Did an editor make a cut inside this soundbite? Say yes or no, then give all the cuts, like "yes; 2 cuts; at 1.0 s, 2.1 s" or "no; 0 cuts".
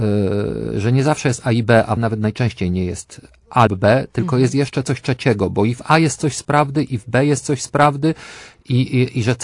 yes; 2 cuts; at 2.0 s, 3.7 s